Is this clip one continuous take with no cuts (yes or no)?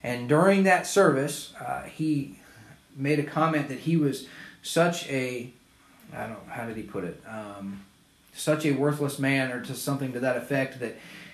yes